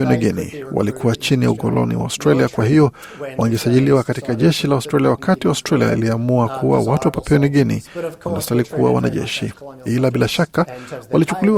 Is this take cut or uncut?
uncut